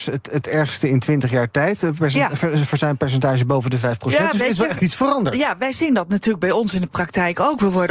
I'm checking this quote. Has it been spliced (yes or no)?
no